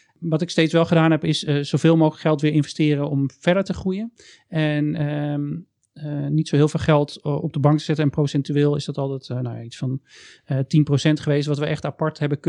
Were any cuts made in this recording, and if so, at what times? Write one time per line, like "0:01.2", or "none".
none